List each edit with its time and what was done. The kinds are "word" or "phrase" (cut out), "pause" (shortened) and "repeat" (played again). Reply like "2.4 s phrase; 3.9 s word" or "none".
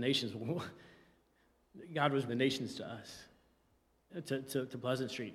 2.3 s word; 4.1 s word